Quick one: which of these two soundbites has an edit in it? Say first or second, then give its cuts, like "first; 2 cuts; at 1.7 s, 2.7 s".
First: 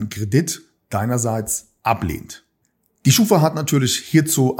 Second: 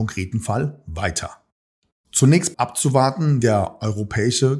second; 2 cuts; at 2.5 s, 3.4 s